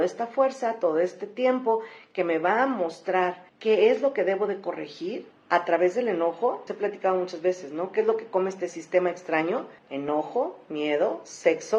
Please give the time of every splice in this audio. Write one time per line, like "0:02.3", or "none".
0:03.5
0:05.3
0:06.7
0:09.8